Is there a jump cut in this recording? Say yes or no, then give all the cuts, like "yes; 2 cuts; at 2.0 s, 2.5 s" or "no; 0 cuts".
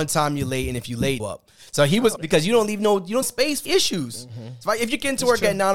yes; 4 cuts; at 1.2 s, 2.2 s, 3.2 s, 3.7 s